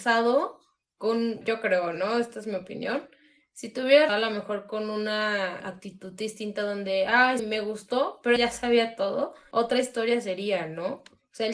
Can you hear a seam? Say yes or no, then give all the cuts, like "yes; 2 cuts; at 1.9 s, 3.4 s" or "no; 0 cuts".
yes; 5 cuts; at 1.4 s, 4.1 s, 5.6 s, 7.4 s, 8.4 s